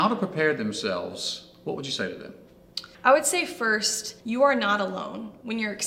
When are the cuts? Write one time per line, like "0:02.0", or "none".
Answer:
0:02.9
0:04.2